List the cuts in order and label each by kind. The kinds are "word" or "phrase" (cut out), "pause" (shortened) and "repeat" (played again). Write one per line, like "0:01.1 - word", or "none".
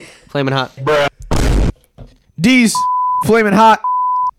none